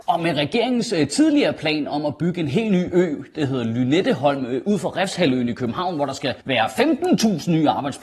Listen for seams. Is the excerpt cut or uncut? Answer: cut